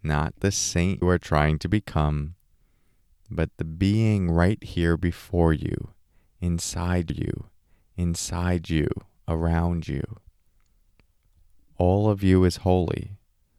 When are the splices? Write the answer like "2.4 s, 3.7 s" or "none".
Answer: 1.0 s, 7.1 s